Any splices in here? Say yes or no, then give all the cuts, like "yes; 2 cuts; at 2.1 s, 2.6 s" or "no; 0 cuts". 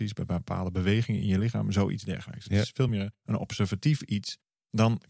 no; 0 cuts